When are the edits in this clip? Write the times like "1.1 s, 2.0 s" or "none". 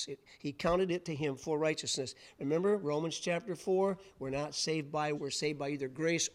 5.1 s